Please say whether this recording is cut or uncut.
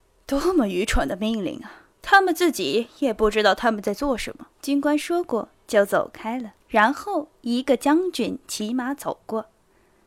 cut